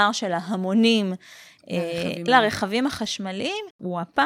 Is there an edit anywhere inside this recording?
yes; 1 cut; at 2.3 s

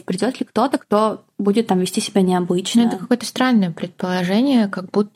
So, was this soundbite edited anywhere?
no; 0 cuts

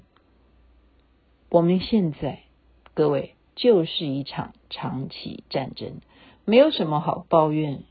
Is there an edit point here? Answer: yes; 1 cut; at 3.5 s

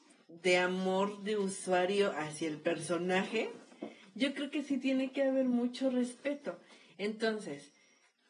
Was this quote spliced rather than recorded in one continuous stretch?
no; 0 cuts

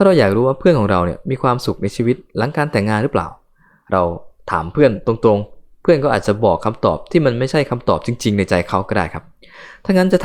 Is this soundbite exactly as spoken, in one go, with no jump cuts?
yes; 0 cuts

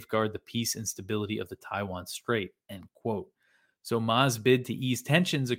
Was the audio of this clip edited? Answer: no; 0 cuts

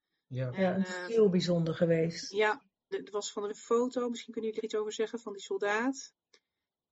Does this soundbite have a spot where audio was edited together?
yes; 4 cuts; at 1.1 s, 2.9 s, 3.5 s, 4.6 s

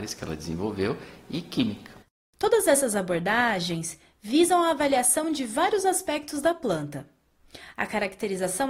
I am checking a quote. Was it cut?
no; 0 cuts

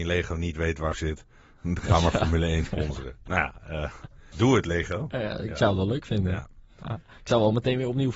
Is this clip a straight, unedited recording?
no; 2 cuts; at 0.9 s, 4.3 s

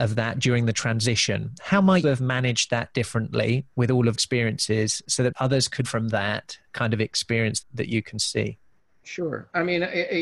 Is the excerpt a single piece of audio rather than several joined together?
no; 6 cuts; at 2.0 s, 4.1 s, 5.3 s, 5.8 s, 6.7 s, 7.6 s

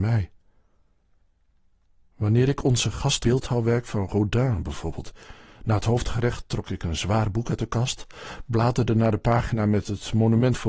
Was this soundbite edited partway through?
yes; 1 cut; at 3.2 s

